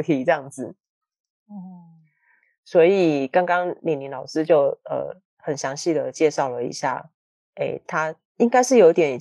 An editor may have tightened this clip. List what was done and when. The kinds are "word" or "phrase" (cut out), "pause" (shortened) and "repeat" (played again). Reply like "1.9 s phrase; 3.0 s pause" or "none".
none